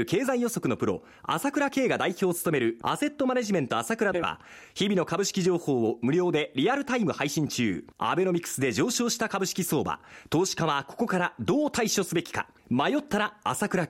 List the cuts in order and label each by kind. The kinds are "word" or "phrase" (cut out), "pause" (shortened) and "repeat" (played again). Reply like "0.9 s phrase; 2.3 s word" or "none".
7.9 s pause; 12.6 s pause